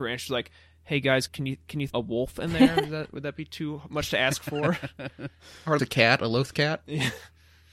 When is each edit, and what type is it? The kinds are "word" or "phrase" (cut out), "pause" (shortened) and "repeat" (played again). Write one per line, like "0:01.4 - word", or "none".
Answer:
0:01.3 - word
0:01.9 - word
0:05.8 - word